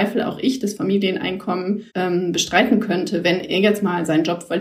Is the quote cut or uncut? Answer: cut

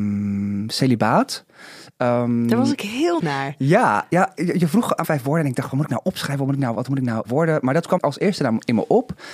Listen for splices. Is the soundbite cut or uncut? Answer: cut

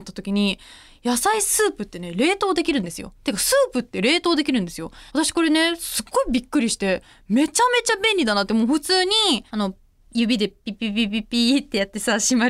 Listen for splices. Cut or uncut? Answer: cut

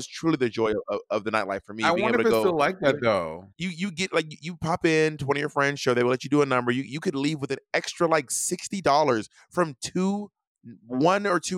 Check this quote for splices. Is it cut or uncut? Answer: cut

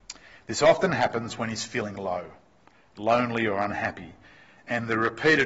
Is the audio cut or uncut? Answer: uncut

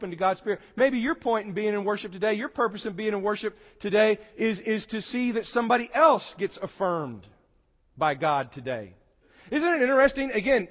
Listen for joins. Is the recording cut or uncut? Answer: uncut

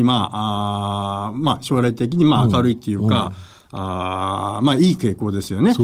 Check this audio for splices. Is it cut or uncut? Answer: uncut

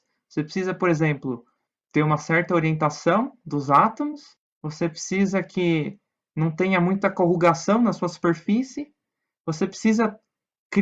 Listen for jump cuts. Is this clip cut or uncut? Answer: uncut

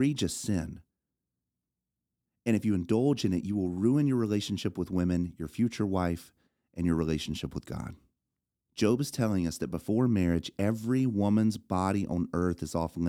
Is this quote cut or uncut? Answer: cut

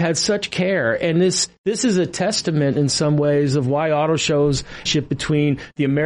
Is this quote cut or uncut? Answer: cut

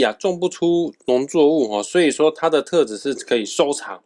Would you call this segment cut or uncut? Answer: uncut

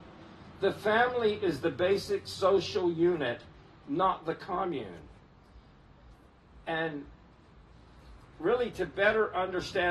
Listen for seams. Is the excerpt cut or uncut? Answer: uncut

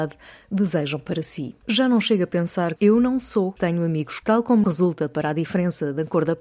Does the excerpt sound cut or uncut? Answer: cut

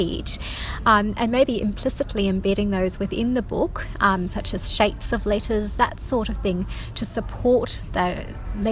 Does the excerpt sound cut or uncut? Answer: uncut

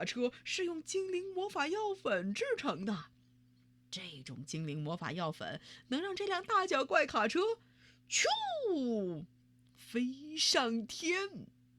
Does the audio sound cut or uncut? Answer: uncut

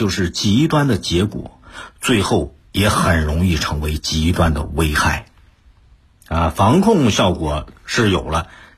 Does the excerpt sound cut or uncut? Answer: uncut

